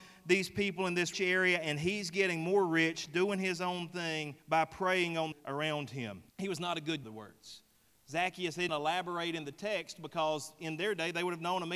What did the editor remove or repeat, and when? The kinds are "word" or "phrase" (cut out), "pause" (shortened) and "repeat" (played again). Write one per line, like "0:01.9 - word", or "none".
0:01.1 - word
0:04.4 - pause
0:05.3 - phrase
0:06.3 - pause
0:07.0 - phrase
0:08.7 - word